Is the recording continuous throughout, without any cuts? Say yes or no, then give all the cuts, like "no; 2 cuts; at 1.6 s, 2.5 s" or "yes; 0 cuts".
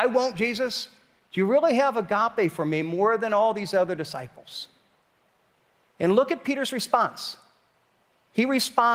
yes; 0 cuts